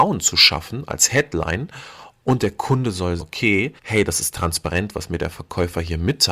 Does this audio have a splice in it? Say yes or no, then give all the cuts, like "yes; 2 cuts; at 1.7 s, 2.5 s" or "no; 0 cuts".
yes; 2 cuts; at 3.2 s, 3.8 s